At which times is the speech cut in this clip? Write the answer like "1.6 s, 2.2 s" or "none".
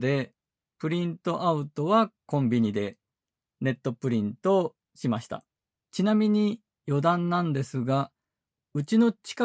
2.2 s, 5.7 s